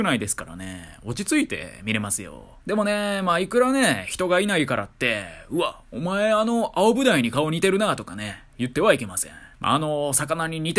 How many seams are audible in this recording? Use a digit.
2